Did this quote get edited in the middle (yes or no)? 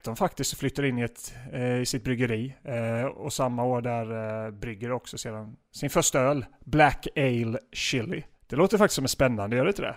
yes